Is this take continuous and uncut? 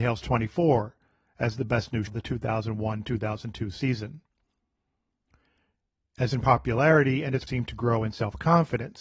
no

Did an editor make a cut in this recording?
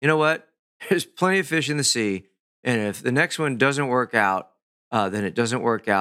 no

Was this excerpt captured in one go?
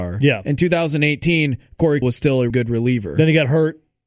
no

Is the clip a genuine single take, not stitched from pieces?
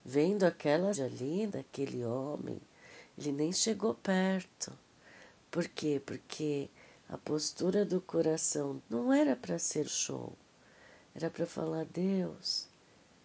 no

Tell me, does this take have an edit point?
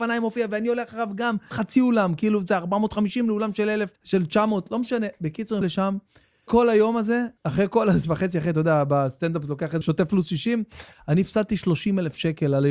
yes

